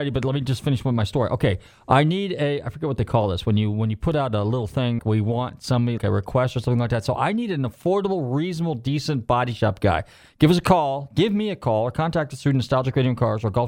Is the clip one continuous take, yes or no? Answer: no